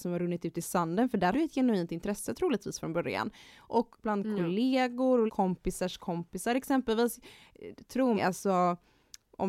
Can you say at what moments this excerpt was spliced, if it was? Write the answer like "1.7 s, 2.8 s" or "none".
1.3 s, 4.0 s, 5.3 s, 8.2 s